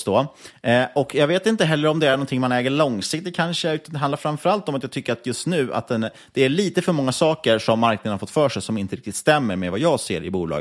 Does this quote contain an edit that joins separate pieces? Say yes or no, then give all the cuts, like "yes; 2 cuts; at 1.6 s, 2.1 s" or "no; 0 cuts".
no; 0 cuts